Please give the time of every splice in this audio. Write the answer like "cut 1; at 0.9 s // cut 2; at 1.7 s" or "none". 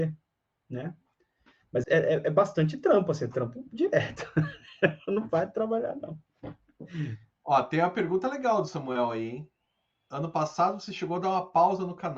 cut 1; at 1.8 s